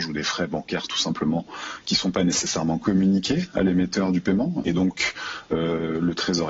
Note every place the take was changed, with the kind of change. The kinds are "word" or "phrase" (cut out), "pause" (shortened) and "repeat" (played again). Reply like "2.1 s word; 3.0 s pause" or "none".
none